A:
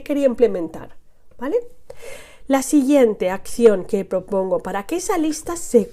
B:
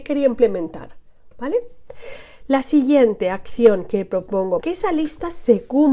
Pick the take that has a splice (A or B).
B